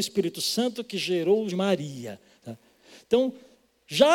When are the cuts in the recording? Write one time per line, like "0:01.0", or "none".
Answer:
0:01.5